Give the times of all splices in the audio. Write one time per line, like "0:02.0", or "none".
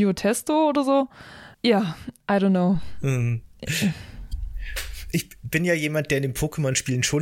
0:01.5